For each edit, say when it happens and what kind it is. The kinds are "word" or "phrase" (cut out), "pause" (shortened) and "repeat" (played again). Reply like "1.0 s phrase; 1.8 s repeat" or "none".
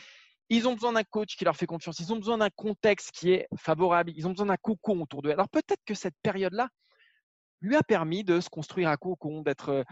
none